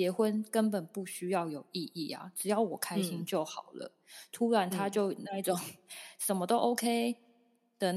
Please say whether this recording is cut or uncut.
uncut